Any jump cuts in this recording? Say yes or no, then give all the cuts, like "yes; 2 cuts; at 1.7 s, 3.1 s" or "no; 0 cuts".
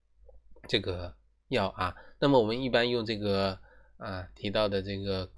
no; 0 cuts